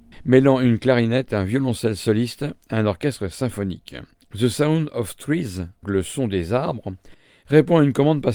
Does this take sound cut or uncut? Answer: cut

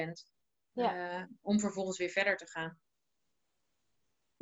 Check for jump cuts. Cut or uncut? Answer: uncut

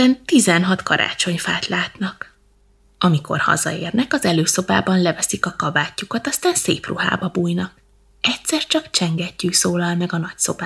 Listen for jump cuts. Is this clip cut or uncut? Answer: uncut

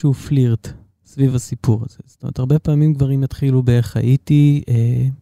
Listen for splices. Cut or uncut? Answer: uncut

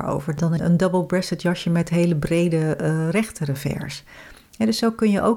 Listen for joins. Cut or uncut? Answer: uncut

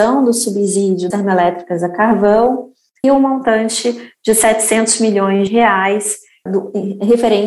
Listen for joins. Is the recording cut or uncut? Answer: cut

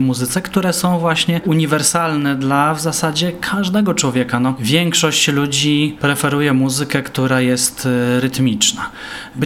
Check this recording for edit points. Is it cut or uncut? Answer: uncut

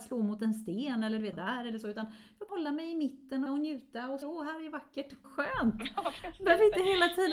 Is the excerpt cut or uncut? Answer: cut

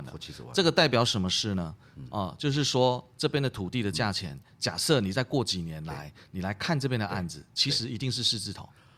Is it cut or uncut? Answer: uncut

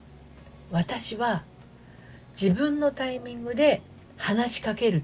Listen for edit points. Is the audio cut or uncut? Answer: cut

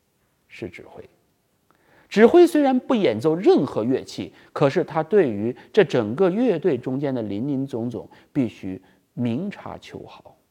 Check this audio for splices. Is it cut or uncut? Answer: uncut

